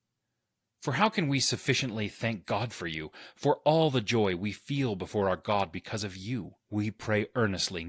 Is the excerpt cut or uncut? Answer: cut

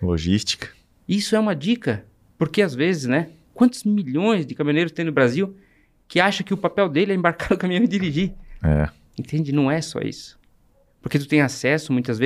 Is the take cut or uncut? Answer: uncut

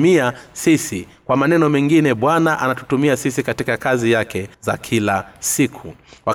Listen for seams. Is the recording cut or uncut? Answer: cut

